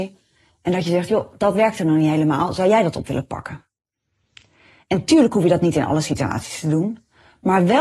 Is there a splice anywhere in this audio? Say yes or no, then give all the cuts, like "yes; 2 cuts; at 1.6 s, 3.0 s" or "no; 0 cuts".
no; 0 cuts